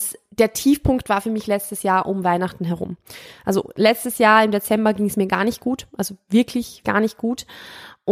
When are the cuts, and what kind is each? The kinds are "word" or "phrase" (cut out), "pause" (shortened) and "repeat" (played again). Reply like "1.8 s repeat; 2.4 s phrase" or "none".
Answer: 6.8 s word